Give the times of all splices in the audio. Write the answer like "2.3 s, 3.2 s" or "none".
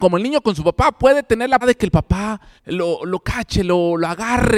1.6 s, 2.6 s